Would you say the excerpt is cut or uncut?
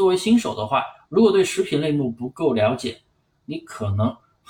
uncut